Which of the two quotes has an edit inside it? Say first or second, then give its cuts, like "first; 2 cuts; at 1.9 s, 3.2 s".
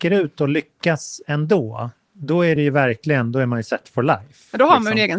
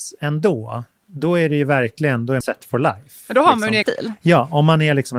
second; 2 cuts; at 2.4 s, 3.8 s